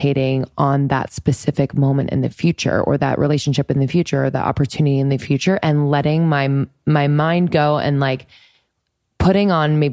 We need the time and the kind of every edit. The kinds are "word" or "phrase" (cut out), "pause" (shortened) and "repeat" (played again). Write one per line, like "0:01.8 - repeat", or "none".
none